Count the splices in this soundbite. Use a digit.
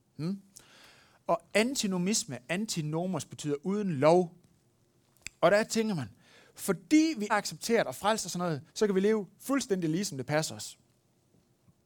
2